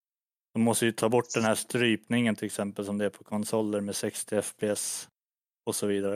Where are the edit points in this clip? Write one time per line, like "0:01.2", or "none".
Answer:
none